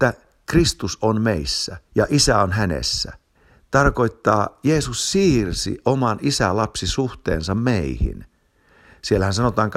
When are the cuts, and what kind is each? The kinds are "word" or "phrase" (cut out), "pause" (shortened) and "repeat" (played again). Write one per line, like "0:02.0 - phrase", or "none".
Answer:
0:01.9 - pause
0:03.3 - pause